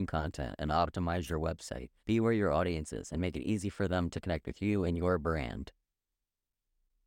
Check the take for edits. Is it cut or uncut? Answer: cut